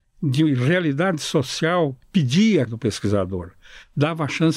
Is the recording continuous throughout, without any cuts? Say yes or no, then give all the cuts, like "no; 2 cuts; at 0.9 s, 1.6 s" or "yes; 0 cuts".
no; 2 cuts; at 2.0 s, 2.7 s